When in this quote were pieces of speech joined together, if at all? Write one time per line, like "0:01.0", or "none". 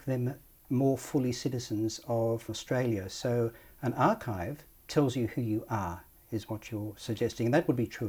0:02.5